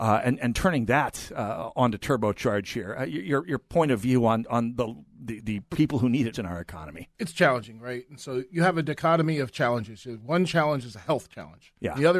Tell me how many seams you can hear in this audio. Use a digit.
2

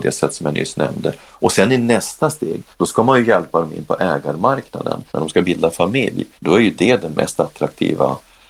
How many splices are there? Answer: 3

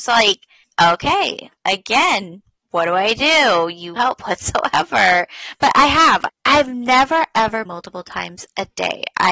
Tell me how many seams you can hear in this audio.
4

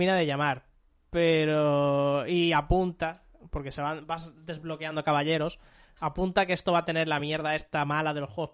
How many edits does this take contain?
0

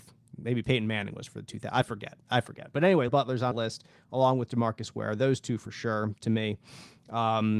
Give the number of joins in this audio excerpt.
2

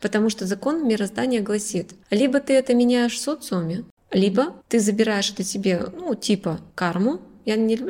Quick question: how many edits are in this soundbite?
3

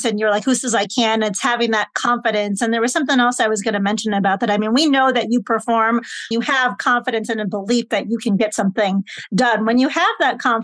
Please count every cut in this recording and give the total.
1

